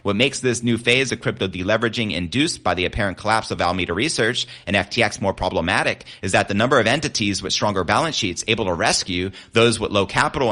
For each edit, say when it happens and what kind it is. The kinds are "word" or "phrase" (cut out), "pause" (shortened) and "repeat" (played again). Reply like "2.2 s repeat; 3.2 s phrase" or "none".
none

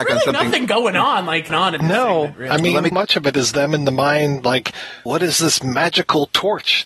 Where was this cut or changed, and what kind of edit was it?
1.5 s phrase; 2.9 s word; 5.1 s word

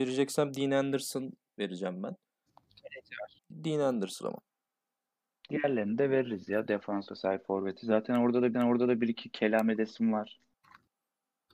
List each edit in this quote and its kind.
3.4 s pause; 4.2 s word; 7.1 s word; 8.5 s repeat

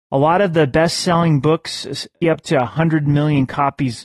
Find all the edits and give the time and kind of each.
2.2 s word

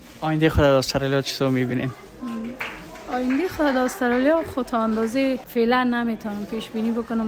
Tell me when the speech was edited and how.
none

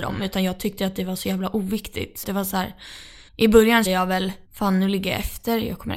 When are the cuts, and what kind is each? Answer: 2.2 s word; 3.3 s pause; 3.9 s word; 4.4 s pause

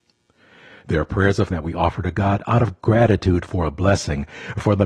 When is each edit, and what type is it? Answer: 1.5 s word

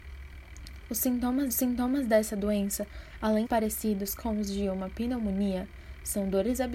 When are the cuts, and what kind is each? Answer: 1.5 s repeat; 3.4 s word

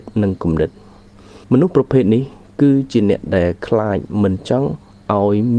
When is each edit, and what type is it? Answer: 1.4 s pause

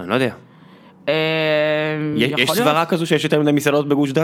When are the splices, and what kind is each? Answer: none

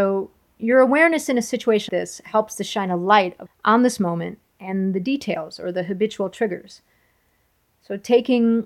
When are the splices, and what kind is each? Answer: 1.9 s word; 3.5 s word

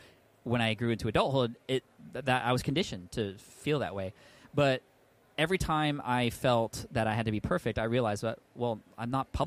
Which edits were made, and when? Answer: none

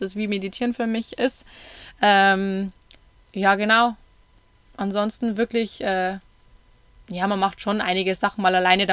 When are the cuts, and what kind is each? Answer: none

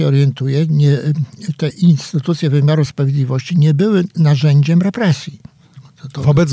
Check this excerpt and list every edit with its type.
none

